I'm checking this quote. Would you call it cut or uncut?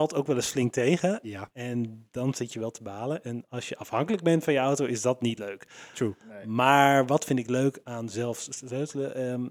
uncut